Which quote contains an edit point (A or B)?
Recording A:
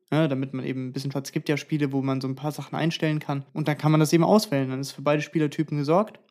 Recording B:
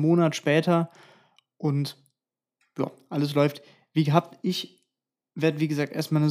A